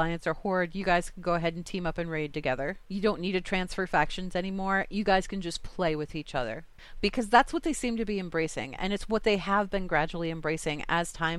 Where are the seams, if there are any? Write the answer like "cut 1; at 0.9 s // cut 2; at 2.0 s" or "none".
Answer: cut 1; at 2.8 s